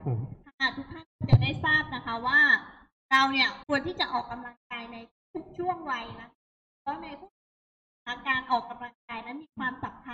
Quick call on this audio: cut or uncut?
cut